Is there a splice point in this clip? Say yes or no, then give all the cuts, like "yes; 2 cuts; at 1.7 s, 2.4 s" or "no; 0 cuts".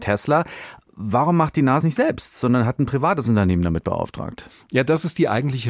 yes; 1 cut; at 1.8 s